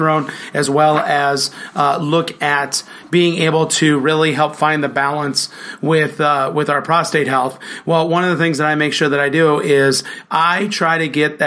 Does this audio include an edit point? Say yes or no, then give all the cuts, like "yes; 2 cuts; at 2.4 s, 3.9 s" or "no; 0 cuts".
no; 0 cuts